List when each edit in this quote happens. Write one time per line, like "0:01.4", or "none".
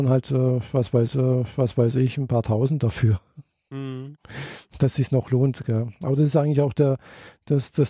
0:01.1